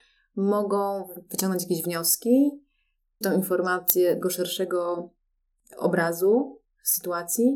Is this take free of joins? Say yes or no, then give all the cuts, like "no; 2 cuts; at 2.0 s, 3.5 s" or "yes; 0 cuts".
no; 2 cuts; at 3.2 s, 4.2 s